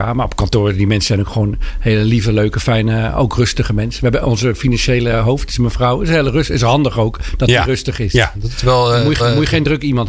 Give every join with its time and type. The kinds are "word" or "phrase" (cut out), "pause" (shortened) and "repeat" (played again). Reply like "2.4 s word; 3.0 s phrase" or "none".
4.2 s word; 9.2 s repeat